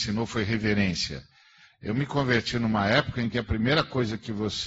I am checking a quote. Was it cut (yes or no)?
no